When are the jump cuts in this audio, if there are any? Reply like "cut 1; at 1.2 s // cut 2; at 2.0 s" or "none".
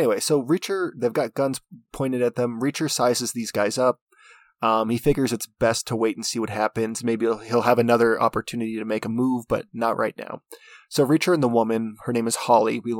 none